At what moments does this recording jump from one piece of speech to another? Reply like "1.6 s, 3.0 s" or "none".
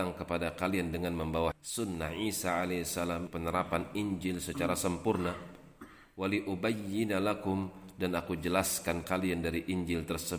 1.5 s, 3.3 s, 9.0 s

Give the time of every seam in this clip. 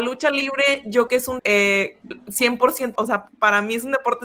1.1 s, 1.4 s, 3.0 s

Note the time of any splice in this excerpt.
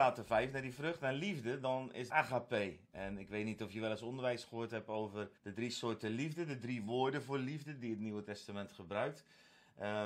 2.1 s, 5.4 s

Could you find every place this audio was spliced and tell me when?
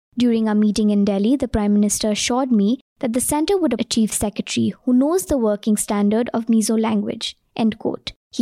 3.8 s

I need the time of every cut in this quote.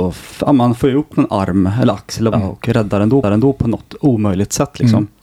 2.3 s, 3.2 s

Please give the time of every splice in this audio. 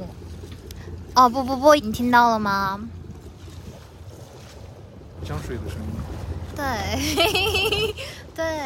1.8 s

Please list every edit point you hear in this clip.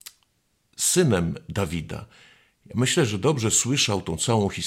none

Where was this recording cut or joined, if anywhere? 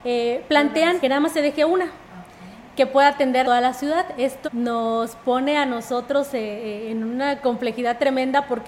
1.0 s, 3.4 s, 4.4 s

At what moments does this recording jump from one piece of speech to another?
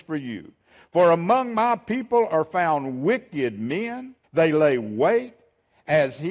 4.2 s

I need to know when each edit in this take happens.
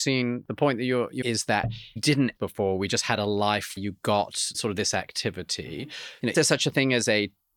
1.2 s, 2.0 s, 2.4 s, 3.8 s, 4.5 s, 6.3 s

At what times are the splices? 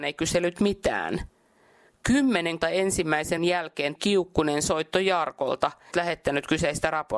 2.6 s, 3.4 s, 4.0 s, 5.9 s

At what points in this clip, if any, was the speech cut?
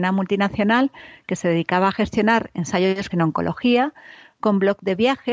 3.1 s

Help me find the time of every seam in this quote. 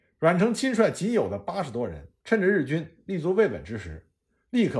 2.2 s

